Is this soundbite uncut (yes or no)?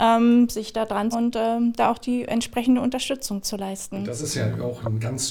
no